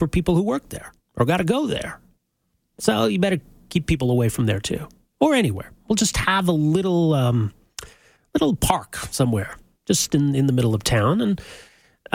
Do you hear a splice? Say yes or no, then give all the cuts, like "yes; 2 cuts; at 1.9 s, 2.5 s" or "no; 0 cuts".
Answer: no; 0 cuts